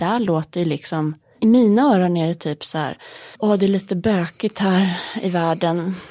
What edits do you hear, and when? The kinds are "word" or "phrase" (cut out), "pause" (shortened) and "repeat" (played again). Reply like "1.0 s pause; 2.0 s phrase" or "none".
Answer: 3.3 s pause

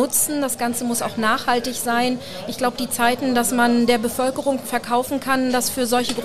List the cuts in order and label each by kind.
4.6 s word

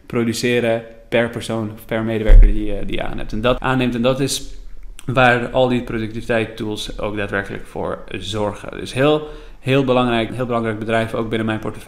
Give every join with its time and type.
3.6 s word; 10.3 s word

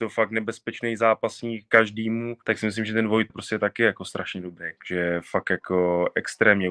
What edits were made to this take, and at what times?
2.4 s pause; 3.3 s word; 4.8 s pause

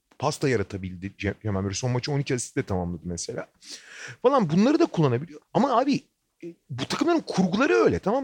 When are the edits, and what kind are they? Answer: 5.4 s pause

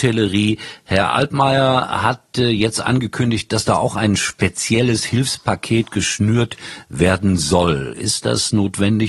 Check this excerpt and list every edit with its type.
none

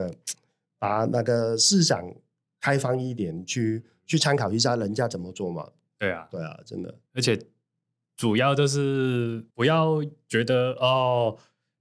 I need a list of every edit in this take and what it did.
7.1 s pause; 9.5 s pause

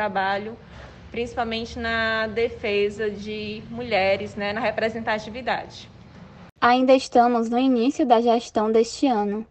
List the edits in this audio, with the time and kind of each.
none

